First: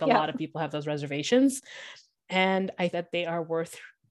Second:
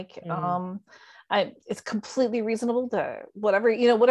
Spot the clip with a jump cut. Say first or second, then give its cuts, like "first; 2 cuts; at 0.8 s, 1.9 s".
first; 1 cut; at 2.9 s